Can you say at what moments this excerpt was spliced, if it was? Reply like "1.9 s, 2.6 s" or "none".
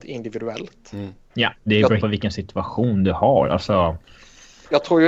1.7 s, 2.0 s